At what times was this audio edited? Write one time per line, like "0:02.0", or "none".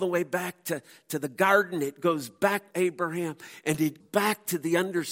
0:02.7
0:04.0